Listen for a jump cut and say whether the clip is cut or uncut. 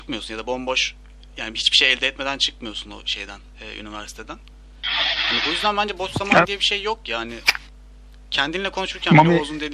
uncut